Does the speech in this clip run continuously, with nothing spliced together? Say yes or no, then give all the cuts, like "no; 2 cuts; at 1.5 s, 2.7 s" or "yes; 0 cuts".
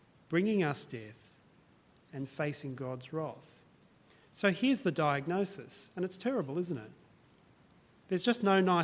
yes; 0 cuts